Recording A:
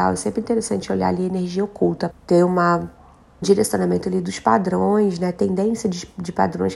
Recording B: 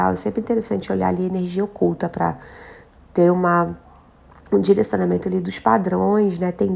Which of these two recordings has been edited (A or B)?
A